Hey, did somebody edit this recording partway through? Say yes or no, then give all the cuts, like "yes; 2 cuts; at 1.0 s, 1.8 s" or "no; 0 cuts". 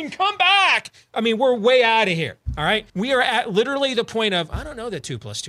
yes; 1 cut; at 2.9 s